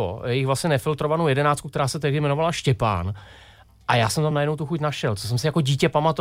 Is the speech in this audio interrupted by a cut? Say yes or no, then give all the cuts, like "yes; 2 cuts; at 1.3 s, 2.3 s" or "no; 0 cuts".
no; 0 cuts